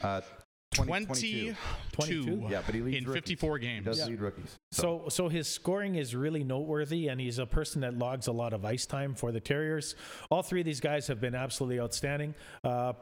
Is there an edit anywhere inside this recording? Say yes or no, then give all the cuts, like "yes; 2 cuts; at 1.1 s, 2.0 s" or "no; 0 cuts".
no; 0 cuts